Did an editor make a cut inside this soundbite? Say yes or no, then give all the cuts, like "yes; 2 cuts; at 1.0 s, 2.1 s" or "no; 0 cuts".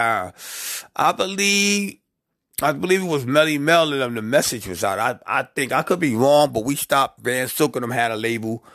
no; 0 cuts